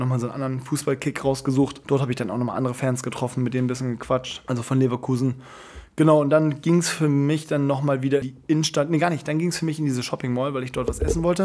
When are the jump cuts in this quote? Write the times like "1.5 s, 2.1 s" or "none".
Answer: 8.2 s